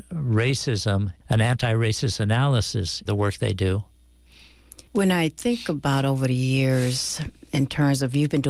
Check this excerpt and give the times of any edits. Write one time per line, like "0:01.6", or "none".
0:01.2
0:03.1
0:04.9